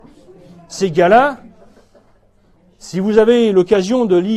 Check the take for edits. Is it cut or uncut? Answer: uncut